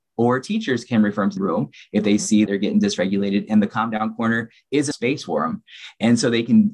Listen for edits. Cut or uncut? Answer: cut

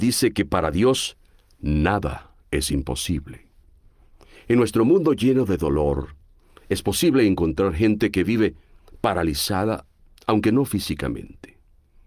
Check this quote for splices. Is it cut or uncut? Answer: uncut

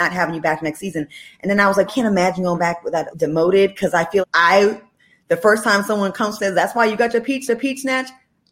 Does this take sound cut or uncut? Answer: cut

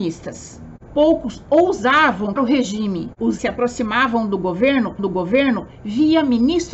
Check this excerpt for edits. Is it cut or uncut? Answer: cut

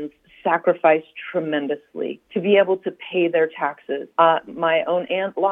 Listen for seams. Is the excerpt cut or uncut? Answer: cut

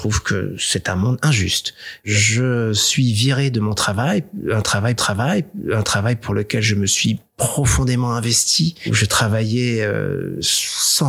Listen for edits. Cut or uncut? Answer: cut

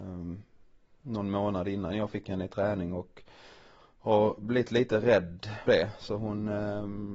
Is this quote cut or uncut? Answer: cut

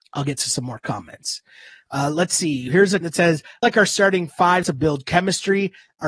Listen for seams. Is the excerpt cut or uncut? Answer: cut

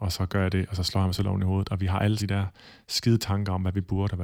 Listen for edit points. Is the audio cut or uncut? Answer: cut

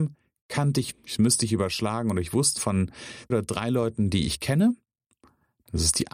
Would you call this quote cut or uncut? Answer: cut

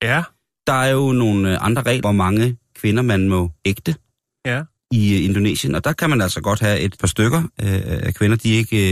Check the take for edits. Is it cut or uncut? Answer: cut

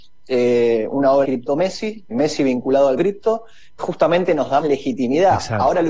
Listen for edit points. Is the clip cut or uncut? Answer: cut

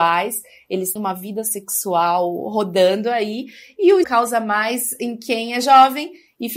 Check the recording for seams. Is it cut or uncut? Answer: cut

